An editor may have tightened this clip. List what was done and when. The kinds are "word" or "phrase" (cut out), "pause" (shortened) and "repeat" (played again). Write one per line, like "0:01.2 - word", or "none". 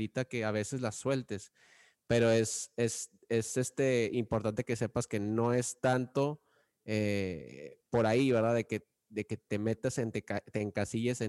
none